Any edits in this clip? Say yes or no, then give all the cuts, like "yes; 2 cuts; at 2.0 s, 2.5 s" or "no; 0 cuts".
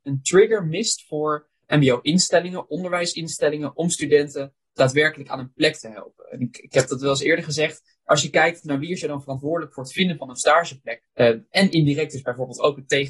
yes; 2 cuts; at 1.6 s, 11.1 s